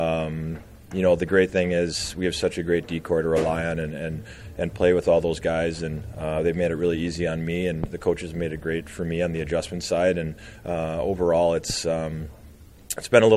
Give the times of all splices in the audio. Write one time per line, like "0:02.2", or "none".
none